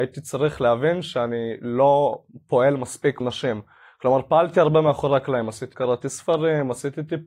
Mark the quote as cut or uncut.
cut